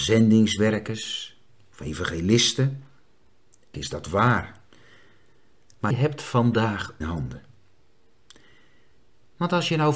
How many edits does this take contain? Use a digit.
3